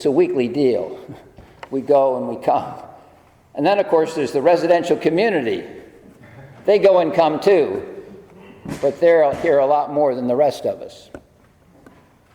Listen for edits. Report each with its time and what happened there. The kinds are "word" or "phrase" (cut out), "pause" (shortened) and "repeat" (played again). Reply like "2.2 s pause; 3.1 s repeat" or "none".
none